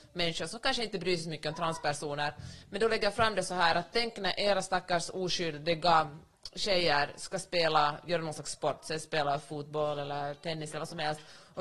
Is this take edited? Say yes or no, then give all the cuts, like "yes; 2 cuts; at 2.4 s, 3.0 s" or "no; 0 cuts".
no; 0 cuts